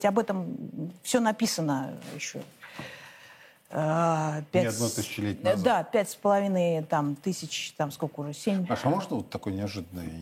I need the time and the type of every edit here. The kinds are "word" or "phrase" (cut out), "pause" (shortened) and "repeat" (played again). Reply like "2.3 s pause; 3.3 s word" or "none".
none